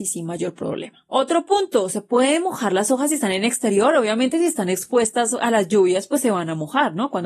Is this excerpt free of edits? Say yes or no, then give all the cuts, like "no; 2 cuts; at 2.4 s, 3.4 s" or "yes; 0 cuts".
yes; 0 cuts